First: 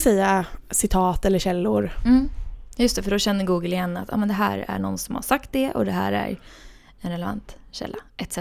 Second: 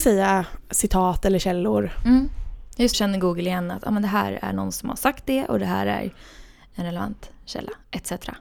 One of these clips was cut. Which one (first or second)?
second